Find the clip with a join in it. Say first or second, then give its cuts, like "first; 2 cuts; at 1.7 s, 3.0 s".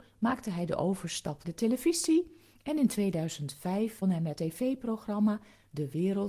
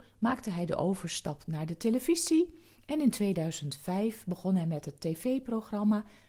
first; 3 cuts; at 1.4 s, 4.0 s, 4.4 s